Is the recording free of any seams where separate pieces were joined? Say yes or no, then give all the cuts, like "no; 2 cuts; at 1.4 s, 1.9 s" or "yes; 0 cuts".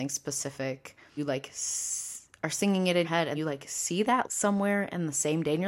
no; 4 cuts; at 1.2 s, 3.0 s, 3.3 s, 4.2 s